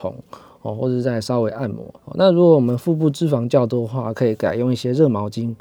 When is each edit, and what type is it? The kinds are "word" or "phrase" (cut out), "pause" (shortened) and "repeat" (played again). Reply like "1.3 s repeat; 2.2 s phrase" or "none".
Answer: 2.0 s pause